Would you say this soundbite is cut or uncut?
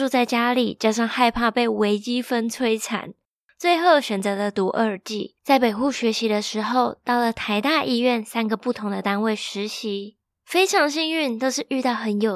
cut